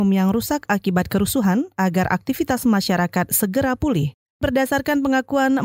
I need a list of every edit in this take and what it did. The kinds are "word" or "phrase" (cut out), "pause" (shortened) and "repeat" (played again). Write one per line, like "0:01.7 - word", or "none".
none